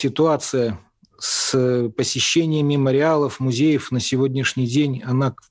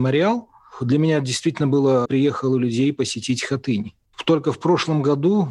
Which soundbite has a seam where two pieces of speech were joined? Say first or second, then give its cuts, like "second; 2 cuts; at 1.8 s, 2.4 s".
second; 1 cut; at 2.0 s